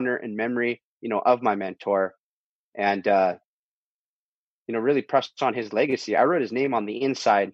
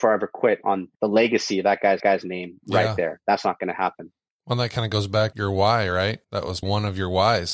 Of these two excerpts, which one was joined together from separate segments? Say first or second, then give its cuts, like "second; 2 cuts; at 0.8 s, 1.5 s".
second; 6 cuts; at 0.9 s, 2.0 s, 4.3 s, 5.3 s, 6.2 s, 6.6 s